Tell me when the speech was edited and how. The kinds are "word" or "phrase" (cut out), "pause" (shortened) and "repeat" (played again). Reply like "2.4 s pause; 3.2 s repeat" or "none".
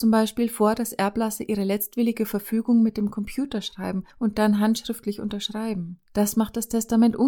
4.1 s pause; 6.1 s pause